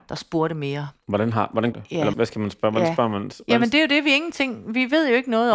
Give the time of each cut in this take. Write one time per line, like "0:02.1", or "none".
0:01.7
0:02.1